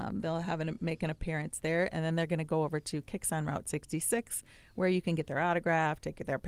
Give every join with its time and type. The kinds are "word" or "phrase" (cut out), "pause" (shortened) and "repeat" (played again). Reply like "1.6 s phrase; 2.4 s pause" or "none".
none